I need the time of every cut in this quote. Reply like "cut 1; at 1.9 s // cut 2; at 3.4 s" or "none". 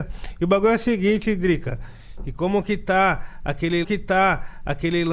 cut 1; at 3.8 s